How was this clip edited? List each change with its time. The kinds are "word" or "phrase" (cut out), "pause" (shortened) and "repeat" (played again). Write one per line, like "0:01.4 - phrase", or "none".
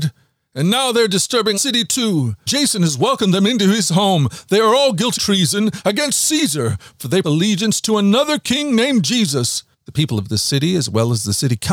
0:01.6 - word
0:02.5 - word
0:05.2 - word
0:07.2 - word
0:09.7 - pause